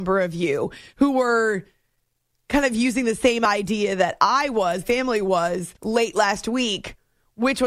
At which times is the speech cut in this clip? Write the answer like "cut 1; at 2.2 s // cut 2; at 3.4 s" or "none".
cut 1; at 4.8 s // cut 2; at 5.8 s